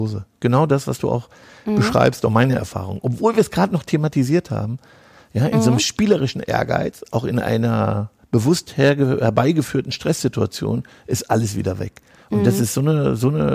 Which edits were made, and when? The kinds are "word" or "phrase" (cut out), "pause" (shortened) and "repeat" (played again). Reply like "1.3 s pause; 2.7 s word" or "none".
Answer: none